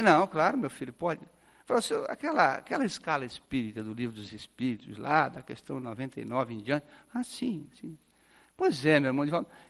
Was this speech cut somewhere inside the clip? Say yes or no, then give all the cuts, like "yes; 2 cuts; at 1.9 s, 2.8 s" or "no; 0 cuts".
no; 0 cuts